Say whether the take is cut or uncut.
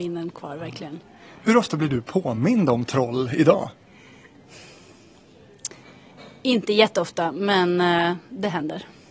uncut